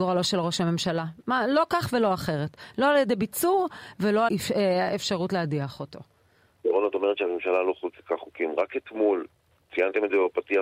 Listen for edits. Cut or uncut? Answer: cut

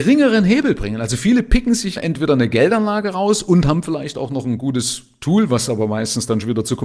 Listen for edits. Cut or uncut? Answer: cut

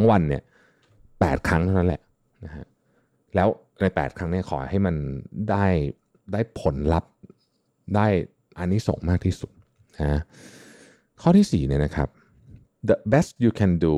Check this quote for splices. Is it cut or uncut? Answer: uncut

